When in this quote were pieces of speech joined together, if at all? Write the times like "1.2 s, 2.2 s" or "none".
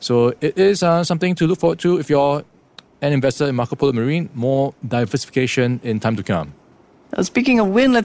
none